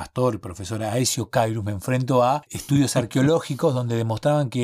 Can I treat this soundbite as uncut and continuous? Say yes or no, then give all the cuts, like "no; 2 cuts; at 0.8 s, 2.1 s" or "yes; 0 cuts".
yes; 0 cuts